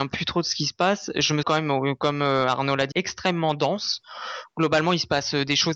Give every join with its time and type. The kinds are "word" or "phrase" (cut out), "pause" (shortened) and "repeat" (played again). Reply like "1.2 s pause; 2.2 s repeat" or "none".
1.4 s word; 2.9 s word